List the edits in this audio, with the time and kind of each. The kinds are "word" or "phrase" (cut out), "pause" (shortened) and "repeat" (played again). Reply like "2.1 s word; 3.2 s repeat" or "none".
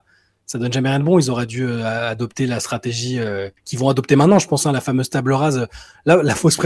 3.6 s pause